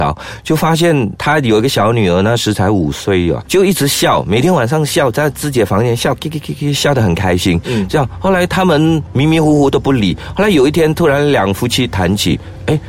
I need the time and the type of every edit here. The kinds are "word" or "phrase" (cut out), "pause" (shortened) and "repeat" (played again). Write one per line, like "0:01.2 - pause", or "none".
0:03.4 - word